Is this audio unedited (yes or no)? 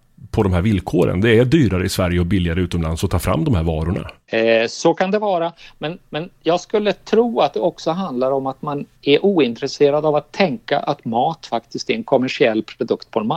no